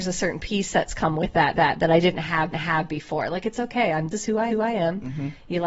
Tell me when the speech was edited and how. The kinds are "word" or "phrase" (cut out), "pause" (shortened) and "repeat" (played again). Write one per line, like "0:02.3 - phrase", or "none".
0:01.5 - repeat
0:02.5 - repeat
0:04.1 - word
0:04.5 - repeat